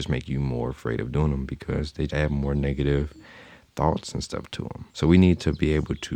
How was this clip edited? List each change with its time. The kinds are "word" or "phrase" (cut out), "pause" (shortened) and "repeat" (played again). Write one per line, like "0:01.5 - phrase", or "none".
0:02.1 - word
0:04.9 - pause